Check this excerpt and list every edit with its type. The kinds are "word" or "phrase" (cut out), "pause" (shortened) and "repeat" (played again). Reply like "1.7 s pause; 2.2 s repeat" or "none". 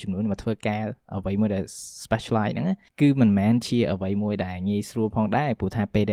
2.1 s phrase

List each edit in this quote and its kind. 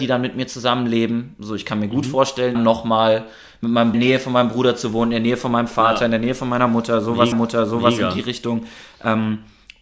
2.5 s word; 3.9 s phrase; 7.3 s repeat

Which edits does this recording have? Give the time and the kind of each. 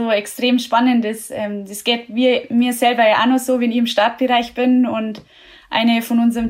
none

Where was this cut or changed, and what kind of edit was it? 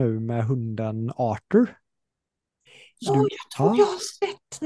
3.1 s word

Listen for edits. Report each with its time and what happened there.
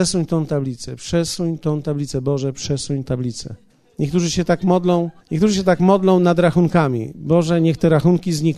3.1 s word; 3.7 s pause; 5.2 s pause

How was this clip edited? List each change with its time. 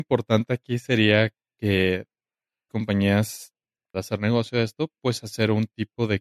2.7 s word; 3.9 s phrase

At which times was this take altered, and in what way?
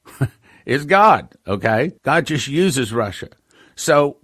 2.0 s pause

